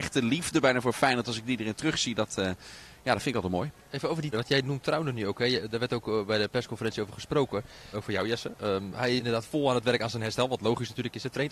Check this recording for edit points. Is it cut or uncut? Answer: cut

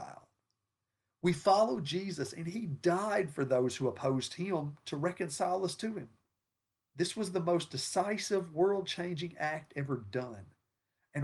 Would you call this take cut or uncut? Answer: uncut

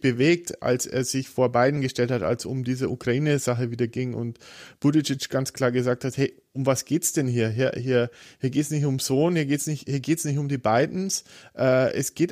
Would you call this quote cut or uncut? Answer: uncut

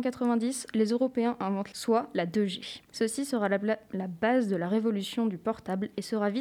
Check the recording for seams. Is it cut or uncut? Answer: cut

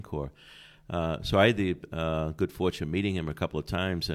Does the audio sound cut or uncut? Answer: uncut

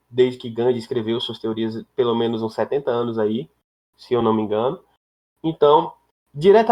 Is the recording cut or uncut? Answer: uncut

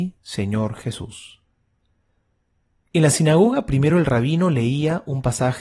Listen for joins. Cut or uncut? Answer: uncut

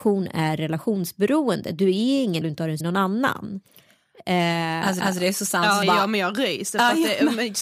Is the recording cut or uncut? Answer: cut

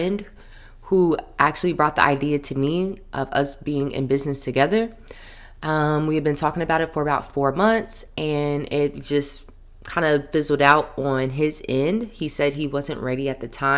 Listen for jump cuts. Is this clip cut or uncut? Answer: uncut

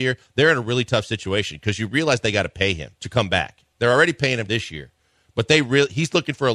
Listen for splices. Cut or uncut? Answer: cut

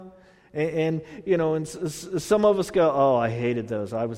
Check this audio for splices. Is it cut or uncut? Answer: uncut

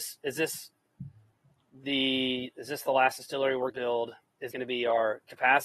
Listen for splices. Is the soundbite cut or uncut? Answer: cut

